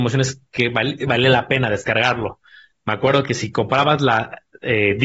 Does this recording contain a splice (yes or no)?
no